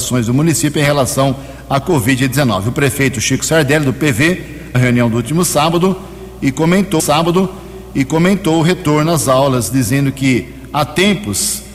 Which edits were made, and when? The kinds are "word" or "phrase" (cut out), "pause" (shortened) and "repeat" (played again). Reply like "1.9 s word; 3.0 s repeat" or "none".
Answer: 4.7 s word; 7.0 s repeat